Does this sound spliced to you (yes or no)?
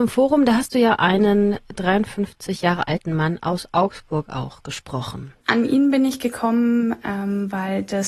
yes